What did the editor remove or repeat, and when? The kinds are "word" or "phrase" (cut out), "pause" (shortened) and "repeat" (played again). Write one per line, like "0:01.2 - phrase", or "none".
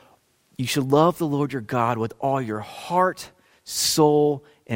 none